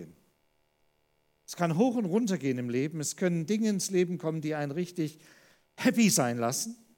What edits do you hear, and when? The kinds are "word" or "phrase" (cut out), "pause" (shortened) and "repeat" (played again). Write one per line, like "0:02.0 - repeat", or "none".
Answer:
none